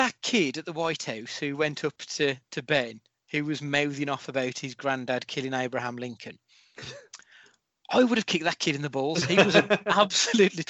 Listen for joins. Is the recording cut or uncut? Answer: uncut